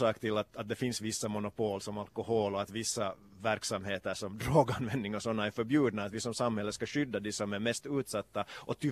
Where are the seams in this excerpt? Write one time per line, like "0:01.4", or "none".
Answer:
none